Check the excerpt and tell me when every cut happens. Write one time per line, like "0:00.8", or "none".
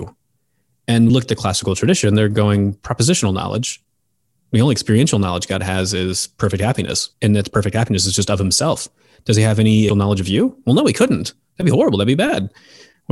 0:01.1
0:07.1
0:09.9